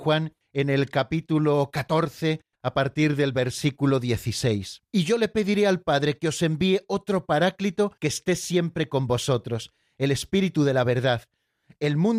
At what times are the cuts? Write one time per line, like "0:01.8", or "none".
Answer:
0:04.9
0:08.0